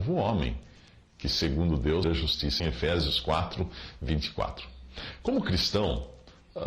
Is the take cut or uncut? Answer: cut